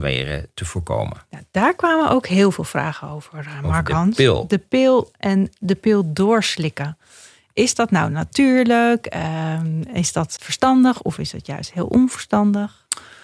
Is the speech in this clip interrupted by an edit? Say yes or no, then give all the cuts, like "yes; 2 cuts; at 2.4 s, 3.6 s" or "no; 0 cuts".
yes; 1 cut; at 10.4 s